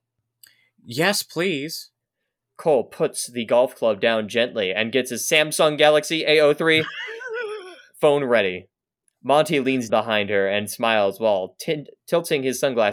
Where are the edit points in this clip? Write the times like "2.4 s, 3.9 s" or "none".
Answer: 9.9 s